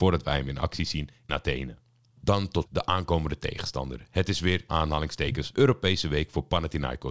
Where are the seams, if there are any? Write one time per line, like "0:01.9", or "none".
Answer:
0:01.3
0:02.6
0:04.7
0:05.5